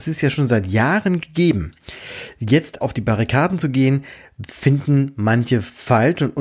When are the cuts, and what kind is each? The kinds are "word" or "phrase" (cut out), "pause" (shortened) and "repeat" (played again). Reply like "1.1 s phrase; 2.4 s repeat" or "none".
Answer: 2.8 s word